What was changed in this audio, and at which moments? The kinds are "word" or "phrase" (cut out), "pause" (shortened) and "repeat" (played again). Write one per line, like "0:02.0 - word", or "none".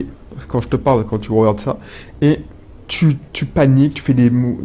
none